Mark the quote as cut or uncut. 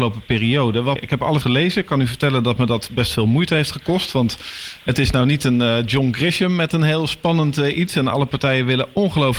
cut